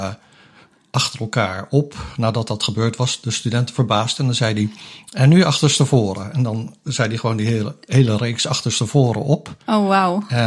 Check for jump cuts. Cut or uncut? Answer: uncut